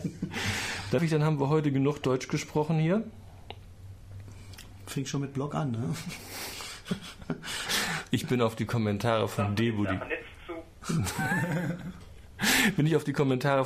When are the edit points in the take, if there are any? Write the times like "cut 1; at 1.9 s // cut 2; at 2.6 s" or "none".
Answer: cut 1; at 1.0 s